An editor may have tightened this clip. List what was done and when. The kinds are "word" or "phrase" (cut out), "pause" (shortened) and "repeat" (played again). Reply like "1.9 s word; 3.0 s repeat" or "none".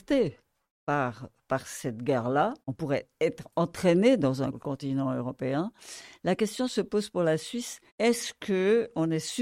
2.6 s pause; 4.5 s phrase; 7.9 s pause